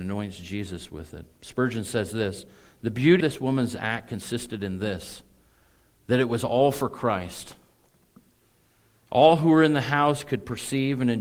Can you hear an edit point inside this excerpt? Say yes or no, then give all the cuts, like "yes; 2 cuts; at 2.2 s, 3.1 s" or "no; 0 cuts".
yes; 1 cut; at 3.2 s